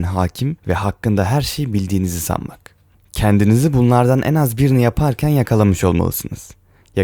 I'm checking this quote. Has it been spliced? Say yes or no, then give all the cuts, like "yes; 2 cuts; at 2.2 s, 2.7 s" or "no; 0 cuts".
no; 0 cuts